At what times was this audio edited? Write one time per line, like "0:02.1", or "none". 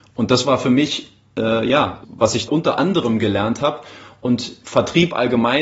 0:02.0
0:02.5